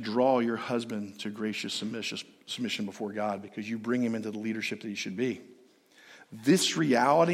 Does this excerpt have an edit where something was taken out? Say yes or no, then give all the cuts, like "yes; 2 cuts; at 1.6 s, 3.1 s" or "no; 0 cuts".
no; 0 cuts